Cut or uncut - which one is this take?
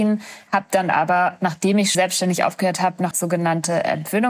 cut